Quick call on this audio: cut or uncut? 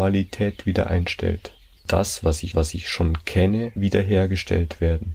cut